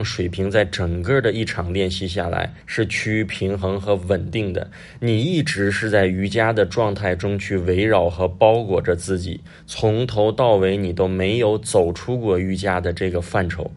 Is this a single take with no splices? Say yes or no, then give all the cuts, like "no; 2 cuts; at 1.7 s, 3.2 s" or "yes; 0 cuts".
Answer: no; 1 cut; at 2.6 s